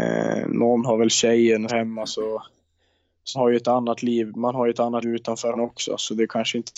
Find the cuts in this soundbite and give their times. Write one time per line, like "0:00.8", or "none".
0:01.7
0:03.3
0:05.0
0:05.5